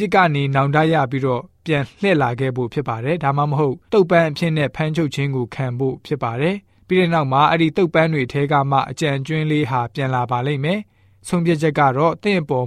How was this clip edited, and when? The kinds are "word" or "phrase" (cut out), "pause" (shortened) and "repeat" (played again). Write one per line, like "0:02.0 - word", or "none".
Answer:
0:03.9 - pause